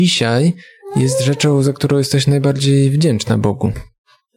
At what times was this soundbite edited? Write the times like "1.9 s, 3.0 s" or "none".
none